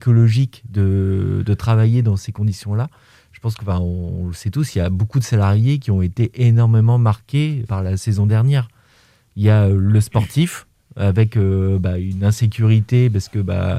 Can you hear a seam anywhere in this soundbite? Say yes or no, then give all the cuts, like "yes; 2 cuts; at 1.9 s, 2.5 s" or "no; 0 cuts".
yes; 1 cut; at 7.7 s